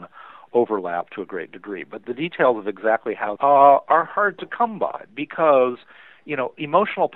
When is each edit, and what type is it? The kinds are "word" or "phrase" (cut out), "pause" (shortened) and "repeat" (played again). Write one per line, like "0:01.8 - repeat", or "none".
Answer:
0:03.4 - phrase